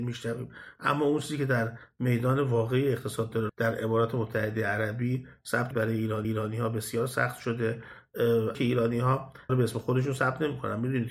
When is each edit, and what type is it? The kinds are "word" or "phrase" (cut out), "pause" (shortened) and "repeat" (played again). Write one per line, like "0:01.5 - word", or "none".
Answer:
0:03.5 - phrase
0:05.7 - word
0:06.2 - repeat
0:08.5 - word
0:09.5 - phrase